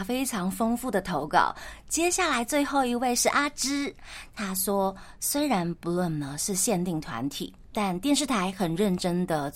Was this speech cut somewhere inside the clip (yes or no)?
no